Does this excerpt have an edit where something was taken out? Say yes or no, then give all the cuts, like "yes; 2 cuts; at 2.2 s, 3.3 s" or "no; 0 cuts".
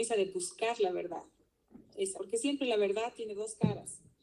yes; 1 cut; at 2.2 s